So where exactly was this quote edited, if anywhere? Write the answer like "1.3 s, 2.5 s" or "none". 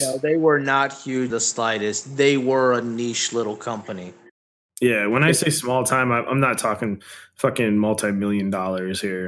1.3 s